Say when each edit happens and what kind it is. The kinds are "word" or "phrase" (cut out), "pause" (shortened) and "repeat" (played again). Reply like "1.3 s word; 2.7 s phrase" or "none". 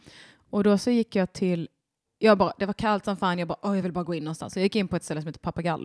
none